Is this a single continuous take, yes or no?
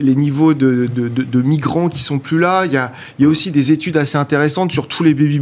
yes